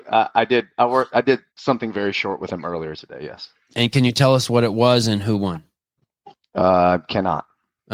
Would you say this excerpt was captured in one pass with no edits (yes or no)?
no